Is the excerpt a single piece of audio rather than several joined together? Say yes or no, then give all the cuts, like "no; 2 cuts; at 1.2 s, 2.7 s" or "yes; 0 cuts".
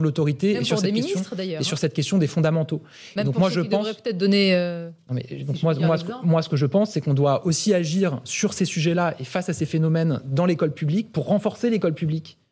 yes; 0 cuts